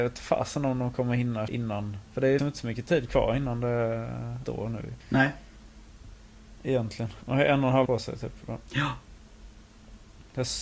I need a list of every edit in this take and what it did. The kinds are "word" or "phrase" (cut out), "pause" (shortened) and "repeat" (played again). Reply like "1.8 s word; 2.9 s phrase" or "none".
1.5 s word; 2.0 s pause; 2.4 s word; 4.4 s word; 5.0 s pause; 7.2 s pause; 7.9 s word